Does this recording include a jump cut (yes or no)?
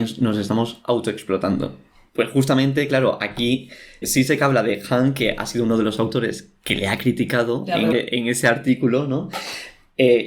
yes